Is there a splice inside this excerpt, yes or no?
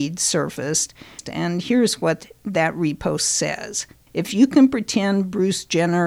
yes